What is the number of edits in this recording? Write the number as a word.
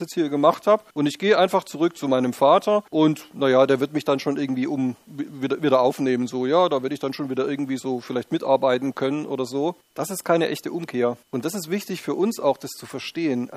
four